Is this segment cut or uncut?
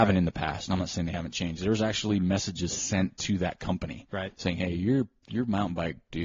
uncut